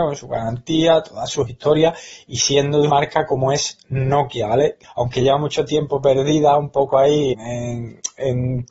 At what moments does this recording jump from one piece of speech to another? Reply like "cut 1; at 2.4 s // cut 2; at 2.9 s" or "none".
cut 1; at 2.9 s // cut 2; at 4.8 s // cut 3; at 7.3 s